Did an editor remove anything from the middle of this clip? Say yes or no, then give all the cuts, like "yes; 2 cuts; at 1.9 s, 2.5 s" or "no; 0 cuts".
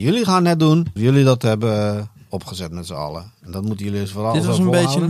yes; 1 cut; at 1.0 s